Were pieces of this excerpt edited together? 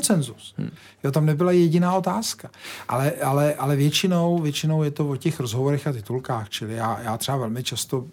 no; 0 cuts

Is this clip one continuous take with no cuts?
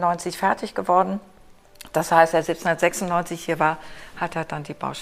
no; 1 cut; at 2.3 s

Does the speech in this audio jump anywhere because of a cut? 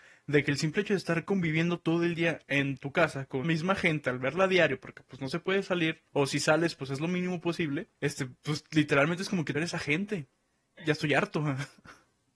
yes; 6 cuts; at 2.4 s, 3.4 s, 6.1 s, 7.9 s, 9.5 s, 10.8 s

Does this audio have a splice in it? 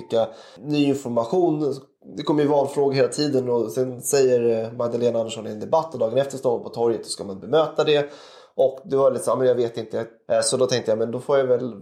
no; 0 cuts

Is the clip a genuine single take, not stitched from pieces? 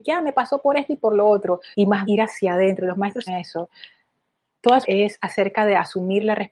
no; 4 cuts; at 1.7 s, 2.0 s, 3.3 s, 4.8 s

